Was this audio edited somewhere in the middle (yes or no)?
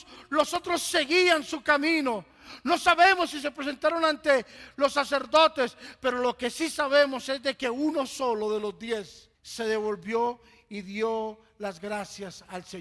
yes